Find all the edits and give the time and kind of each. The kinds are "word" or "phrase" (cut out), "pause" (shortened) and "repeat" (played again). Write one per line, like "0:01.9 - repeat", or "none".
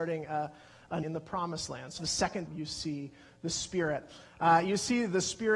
0:01.0 - word
0:02.0 - word
0:02.5 - word